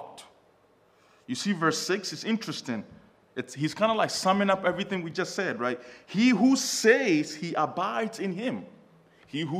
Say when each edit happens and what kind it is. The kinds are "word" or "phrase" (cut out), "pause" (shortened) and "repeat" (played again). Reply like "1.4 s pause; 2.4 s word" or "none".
none